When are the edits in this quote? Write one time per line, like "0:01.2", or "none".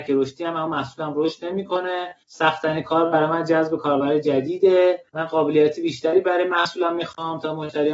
0:02.2
0:05.1

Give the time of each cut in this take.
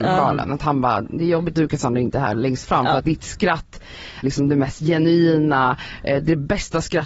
0:01.5
0:02.1
0:03.0
0:04.2

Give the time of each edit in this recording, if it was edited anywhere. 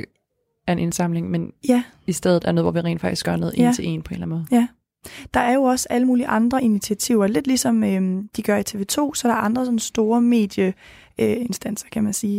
none

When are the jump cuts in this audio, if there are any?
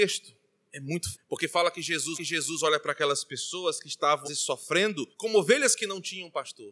0:01.1
0:02.1
0:04.2
0:05.1

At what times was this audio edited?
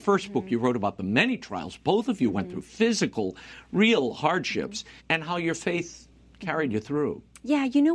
0:05.0

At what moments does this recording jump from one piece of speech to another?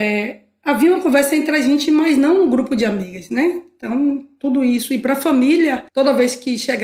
0:05.9

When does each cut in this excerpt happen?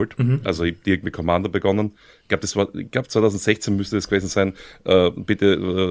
none

